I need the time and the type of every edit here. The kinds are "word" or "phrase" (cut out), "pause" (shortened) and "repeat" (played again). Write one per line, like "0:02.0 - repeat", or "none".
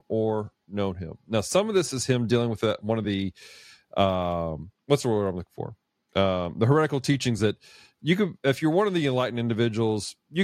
none